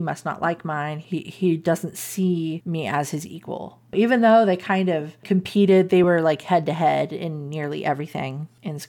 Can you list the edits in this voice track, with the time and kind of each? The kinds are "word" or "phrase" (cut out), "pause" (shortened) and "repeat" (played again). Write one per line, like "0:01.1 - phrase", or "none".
none